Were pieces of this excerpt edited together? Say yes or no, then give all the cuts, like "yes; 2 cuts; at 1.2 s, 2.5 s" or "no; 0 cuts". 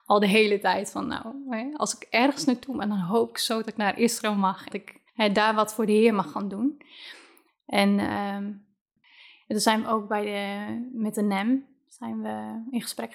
yes; 2 cuts; at 4.7 s, 5.1 s